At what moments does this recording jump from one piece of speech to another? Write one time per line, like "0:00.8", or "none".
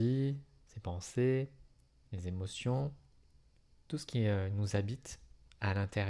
none